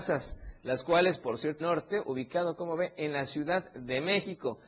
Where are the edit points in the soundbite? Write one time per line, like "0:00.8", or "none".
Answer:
0:01.2
0:01.6